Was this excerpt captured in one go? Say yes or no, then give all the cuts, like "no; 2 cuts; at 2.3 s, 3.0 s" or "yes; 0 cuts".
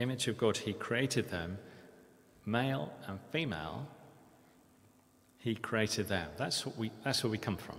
yes; 0 cuts